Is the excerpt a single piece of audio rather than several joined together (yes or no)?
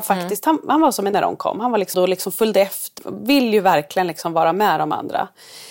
no